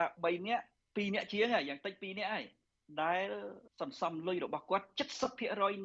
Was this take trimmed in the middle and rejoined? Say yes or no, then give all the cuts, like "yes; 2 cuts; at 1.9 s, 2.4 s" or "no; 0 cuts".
yes; 1 cut; at 3.7 s